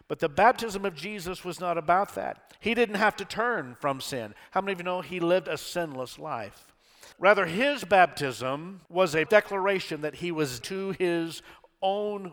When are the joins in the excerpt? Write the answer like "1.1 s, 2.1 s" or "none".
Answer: 7.1 s, 8.9 s, 9.3 s, 10.6 s